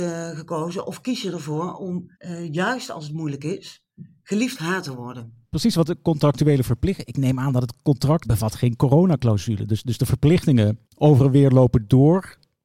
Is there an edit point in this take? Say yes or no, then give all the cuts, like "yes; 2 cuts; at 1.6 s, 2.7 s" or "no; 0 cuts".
yes; 4 cuts; at 2.2 s, 4.5 s, 8.2 s, 10.9 s